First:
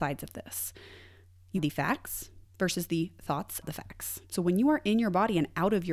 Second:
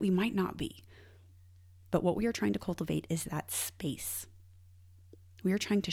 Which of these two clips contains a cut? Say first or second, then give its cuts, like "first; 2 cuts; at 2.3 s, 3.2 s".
first; 4 cuts; at 1.6 s, 2.5 s, 3.6 s, 4.2 s